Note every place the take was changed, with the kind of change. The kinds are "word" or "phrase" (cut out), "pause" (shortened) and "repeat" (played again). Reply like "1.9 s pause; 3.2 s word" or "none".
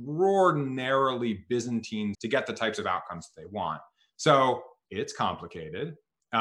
2.1 s word